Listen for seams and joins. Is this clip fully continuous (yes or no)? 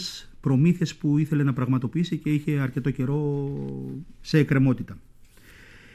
yes